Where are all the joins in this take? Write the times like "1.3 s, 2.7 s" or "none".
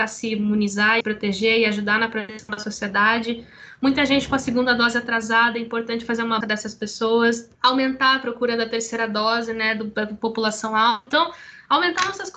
1.0 s, 6.4 s, 7.5 s